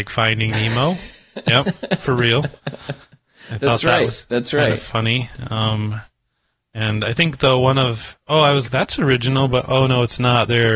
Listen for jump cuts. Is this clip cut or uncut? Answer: cut